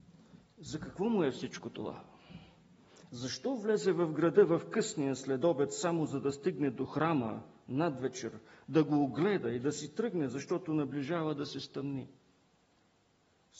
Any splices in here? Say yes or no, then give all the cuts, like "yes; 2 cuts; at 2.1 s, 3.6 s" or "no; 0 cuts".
no; 0 cuts